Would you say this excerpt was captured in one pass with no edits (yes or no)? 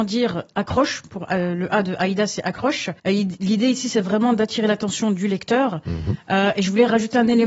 no